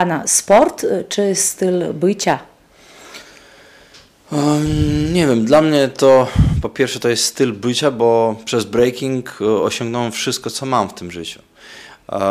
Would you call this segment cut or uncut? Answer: uncut